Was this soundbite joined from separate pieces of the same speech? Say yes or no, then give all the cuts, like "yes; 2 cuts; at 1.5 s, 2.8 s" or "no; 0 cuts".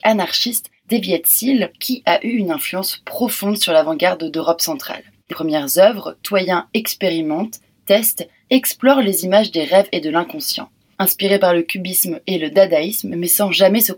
yes; 1 cut; at 5.3 s